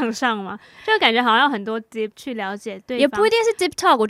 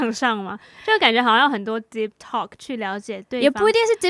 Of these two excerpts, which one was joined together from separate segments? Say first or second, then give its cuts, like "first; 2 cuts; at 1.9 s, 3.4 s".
first; 1 cut; at 2.1 s